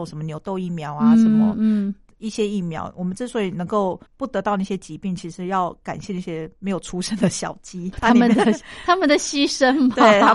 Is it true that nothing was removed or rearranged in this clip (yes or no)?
no